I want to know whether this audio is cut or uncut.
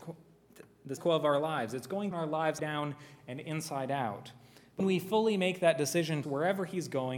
cut